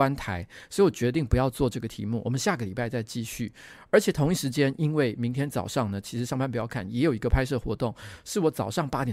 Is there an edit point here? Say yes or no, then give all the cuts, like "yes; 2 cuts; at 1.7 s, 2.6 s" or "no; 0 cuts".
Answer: no; 0 cuts